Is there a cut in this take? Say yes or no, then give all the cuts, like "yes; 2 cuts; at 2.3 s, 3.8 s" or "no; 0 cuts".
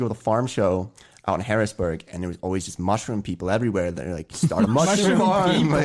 no; 0 cuts